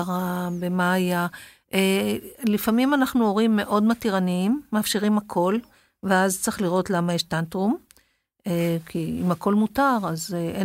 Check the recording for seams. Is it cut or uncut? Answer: uncut